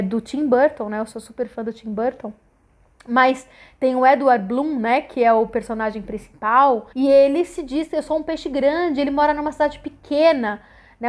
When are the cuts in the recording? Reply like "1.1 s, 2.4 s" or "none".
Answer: 6.9 s